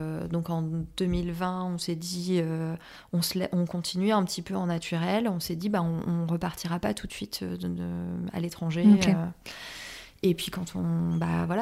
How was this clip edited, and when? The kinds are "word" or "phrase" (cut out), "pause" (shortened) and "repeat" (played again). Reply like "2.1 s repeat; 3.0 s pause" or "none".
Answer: none